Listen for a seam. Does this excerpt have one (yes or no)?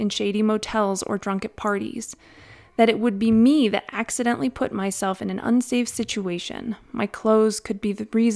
no